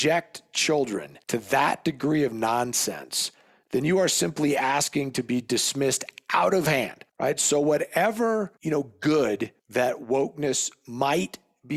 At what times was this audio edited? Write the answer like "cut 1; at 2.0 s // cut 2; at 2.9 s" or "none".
cut 1; at 1.2 s // cut 2; at 7.1 s // cut 3; at 8.6 s // cut 4; at 9.6 s